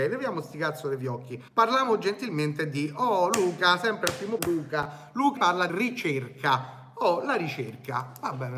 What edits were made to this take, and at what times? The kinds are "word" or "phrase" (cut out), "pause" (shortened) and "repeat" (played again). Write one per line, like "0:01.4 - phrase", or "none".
0:01.5 - pause
0:04.4 - word
0:05.4 - word
0:05.7 - word